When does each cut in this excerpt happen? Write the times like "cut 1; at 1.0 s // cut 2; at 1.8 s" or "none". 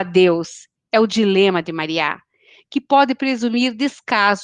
none